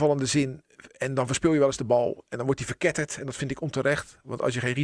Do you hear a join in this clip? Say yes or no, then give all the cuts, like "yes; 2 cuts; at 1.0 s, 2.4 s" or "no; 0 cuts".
no; 0 cuts